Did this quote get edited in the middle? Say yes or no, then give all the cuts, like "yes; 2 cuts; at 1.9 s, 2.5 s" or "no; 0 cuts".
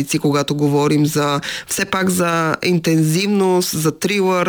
no; 0 cuts